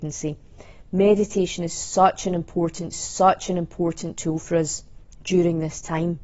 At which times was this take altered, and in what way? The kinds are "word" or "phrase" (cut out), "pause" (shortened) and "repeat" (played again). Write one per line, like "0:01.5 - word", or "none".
0:02.9 - repeat